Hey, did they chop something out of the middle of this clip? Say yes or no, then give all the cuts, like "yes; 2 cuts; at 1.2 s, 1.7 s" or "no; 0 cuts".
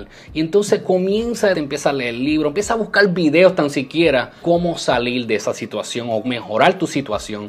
yes; 3 cuts; at 1.5 s, 4.4 s, 6.2 s